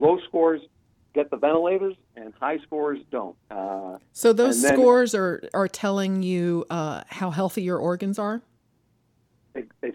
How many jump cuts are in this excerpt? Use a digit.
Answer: 1